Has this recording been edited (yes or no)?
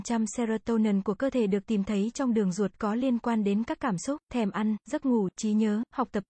yes